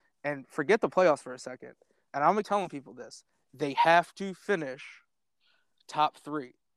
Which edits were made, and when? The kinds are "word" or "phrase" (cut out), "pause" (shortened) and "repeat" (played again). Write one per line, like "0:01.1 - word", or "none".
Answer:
0:02.4 - word